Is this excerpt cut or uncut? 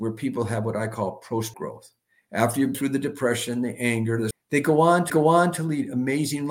cut